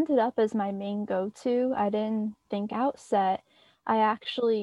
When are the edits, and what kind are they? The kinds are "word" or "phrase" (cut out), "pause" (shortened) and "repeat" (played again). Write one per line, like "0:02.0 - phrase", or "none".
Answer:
0:02.7 - phrase